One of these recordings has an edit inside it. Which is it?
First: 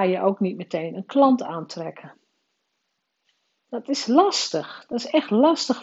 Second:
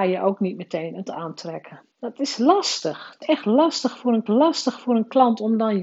second; 4 cuts; at 1.1 s, 1.9 s, 3.2 s, 4.3 s

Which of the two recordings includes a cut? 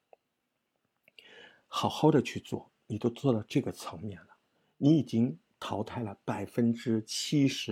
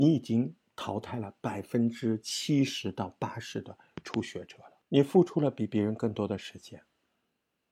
second; 1 cut; at 4.8 s

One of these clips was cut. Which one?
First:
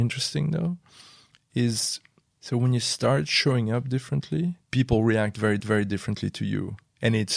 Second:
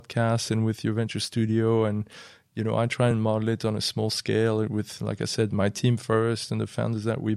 first; 3 cuts; at 2.2 s, 4.6 s, 5.6 s

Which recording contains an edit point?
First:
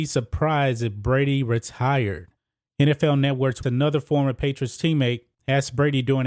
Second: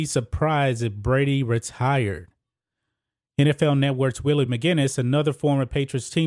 first; 3 cuts; at 2.4 s, 3.6 s, 5.3 s

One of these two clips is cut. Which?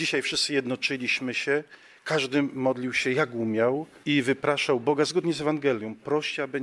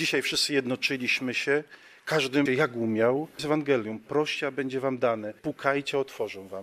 second; 3 cuts; at 2.5 s, 3.4 s, 5.4 s

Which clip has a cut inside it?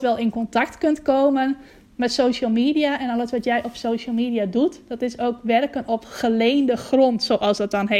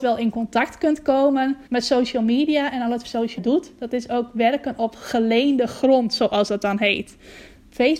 second; 3 cuts; at 1.7 s, 3.0 s, 3.4 s

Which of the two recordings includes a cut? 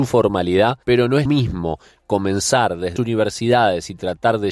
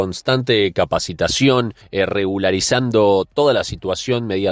first; 2 cuts; at 1.3 s, 3.0 s

